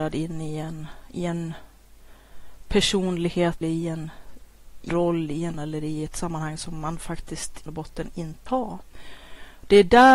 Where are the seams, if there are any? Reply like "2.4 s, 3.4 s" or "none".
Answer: 3.6 s, 4.9 s, 5.5 s, 7.7 s, 8.5 s